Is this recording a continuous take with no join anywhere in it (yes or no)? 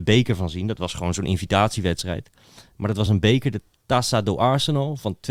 yes